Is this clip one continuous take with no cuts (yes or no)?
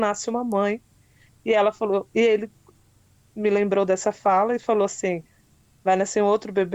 yes